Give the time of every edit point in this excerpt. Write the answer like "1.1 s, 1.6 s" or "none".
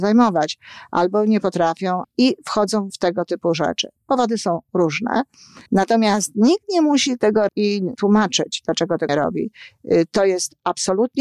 2.0 s, 2.9 s, 5.7 s, 7.5 s, 7.9 s, 9.1 s